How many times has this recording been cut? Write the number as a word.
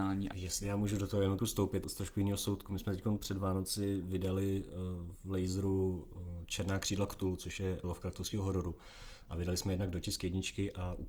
three